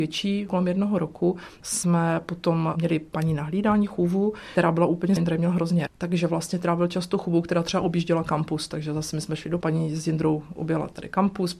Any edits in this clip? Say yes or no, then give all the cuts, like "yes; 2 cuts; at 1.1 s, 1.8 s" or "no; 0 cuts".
yes; 4 cuts; at 1.6 s, 5.2 s, 5.9 s, 9.6 s